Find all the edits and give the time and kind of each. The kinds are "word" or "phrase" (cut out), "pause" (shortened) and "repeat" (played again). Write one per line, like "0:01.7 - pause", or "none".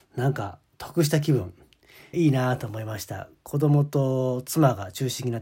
0:02.1 - phrase